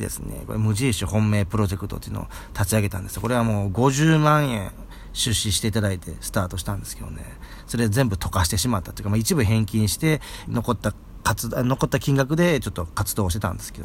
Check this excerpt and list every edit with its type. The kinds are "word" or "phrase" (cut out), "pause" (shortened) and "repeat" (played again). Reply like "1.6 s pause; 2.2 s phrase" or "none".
10.5 s phrase